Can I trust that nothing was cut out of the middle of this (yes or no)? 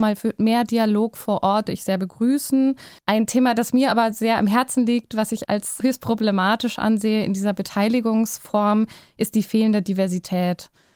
no